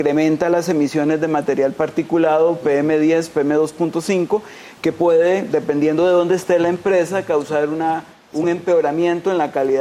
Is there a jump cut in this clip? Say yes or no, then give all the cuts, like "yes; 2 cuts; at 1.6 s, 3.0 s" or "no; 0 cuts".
no; 0 cuts